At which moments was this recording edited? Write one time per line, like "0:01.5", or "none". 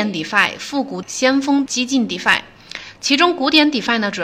0:01.0
0:01.7